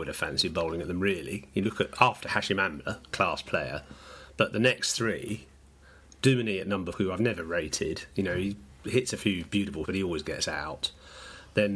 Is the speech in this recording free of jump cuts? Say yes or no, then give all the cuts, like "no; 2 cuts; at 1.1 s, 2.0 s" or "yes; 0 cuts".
no; 3 cuts; at 1.6 s, 6.9 s, 9.8 s